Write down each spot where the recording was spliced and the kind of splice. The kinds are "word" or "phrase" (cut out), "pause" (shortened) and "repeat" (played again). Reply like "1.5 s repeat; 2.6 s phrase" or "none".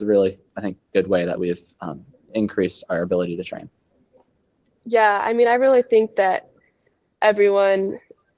none